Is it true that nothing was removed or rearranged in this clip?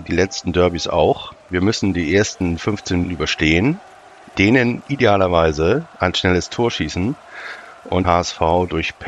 no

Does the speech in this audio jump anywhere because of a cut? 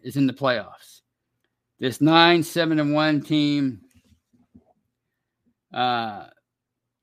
no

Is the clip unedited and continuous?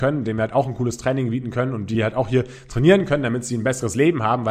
yes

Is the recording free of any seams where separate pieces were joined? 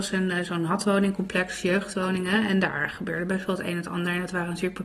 yes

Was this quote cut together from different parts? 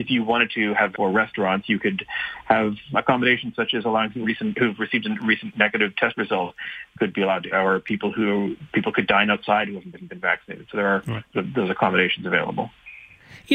yes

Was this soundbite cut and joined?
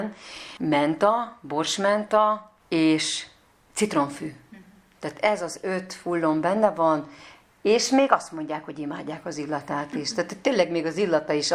no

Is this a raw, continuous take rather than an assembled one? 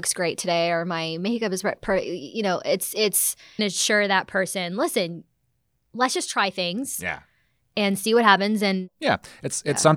no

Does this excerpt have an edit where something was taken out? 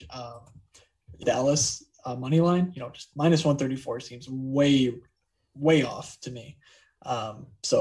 yes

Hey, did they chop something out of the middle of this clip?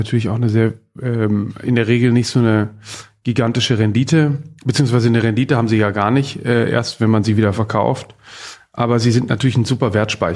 yes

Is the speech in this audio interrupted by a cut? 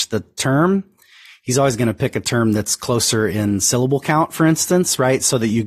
no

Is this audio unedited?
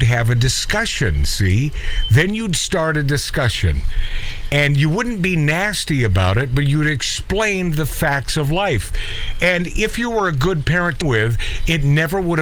no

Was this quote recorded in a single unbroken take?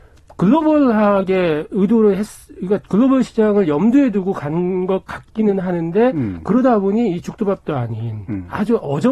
yes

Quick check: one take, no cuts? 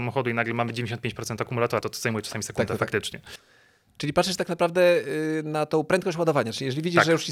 no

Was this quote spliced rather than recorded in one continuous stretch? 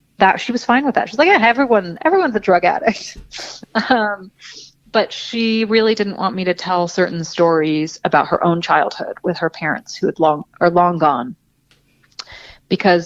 no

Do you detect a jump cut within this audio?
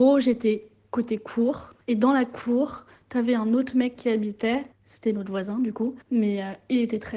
yes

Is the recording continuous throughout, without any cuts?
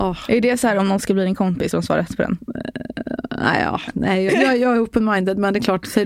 no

